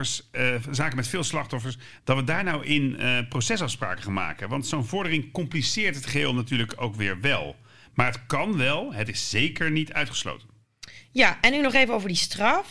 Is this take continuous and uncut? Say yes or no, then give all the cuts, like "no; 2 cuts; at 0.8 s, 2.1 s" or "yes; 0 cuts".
yes; 0 cuts